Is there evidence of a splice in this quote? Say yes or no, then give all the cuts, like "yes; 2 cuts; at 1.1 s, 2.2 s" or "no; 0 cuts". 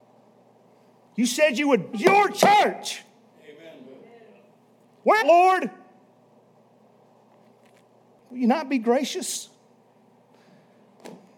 yes; 2 cuts; at 1.9 s, 5.2 s